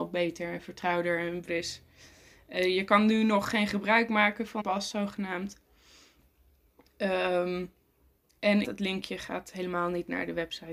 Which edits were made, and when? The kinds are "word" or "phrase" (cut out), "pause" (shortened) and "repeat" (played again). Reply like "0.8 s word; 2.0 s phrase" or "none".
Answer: 1.5 s word; 4.6 s word; 8.6 s word